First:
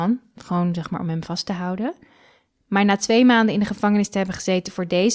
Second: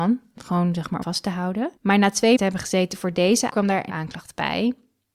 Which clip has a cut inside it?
second; 5 cuts; at 1.0 s, 1.8 s, 2.4 s, 3.5 s, 3.9 s

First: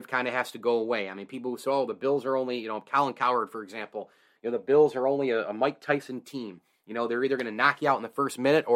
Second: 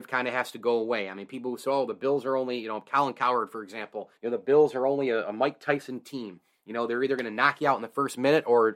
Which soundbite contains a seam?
second; 1 cut; at 4.2 s

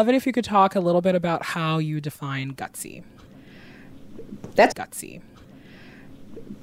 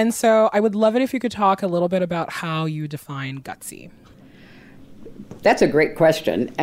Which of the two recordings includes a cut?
first; 1 cut; at 4.7 s

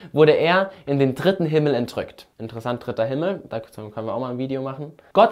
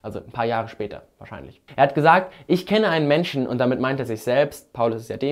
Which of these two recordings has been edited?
first; 1 cut; at 2.3 s

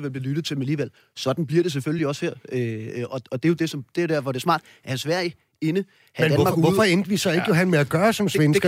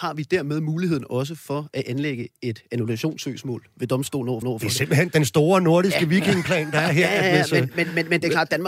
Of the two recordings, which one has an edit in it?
second; 1 cut; at 4.4 s

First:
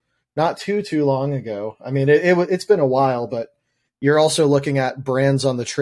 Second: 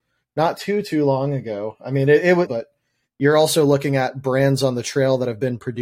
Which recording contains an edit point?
second; 1 cut; at 2.5 s

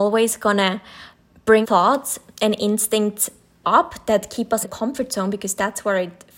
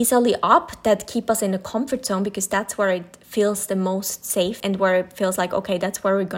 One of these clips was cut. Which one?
first; 3 cuts; at 1.6 s, 3.6 s, 4.6 s

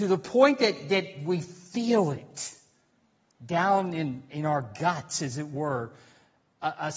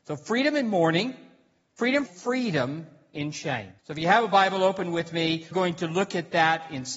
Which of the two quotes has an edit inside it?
second; 3 cuts; at 2.1 s, 3.8 s, 5.5 s

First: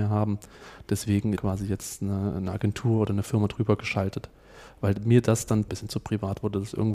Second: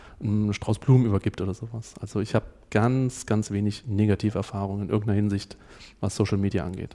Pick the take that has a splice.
first; 2 cuts; at 1.4 s, 5.7 s

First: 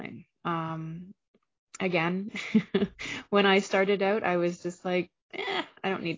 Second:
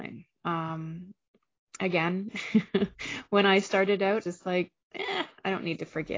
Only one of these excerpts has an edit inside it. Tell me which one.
second; 1 cut; at 4.2 s

